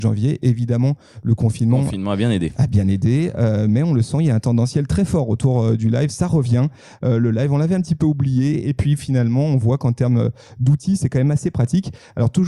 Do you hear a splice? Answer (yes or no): no